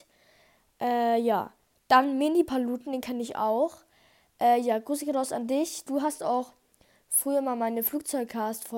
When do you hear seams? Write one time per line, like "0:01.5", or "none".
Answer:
none